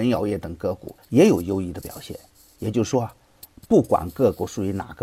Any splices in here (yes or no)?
yes